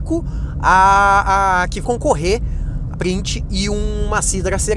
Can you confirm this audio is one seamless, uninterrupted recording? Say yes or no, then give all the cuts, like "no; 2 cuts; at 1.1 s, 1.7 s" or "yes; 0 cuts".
no; 2 cuts; at 1.8 s, 2.9 s